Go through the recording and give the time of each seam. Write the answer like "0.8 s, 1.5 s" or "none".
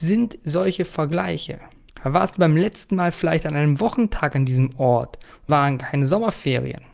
1.9 s, 5.5 s